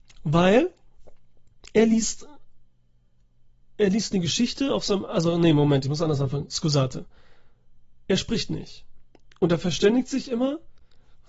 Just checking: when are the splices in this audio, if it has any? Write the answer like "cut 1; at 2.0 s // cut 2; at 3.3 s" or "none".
none